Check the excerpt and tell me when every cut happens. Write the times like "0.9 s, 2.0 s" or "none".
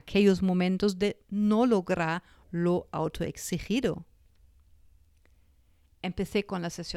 none